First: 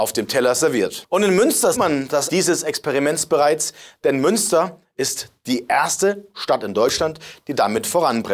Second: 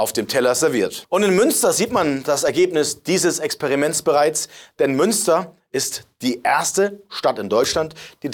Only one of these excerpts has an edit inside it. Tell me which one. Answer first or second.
first